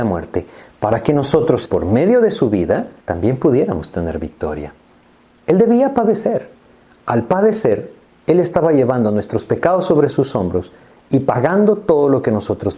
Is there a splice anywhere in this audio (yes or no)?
yes